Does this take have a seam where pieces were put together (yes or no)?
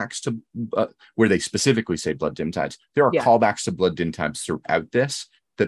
no